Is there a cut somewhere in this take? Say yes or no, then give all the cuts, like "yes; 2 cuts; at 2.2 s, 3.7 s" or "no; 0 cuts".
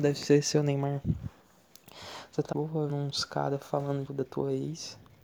yes; 3 cuts; at 2.5 s, 2.9 s, 4.1 s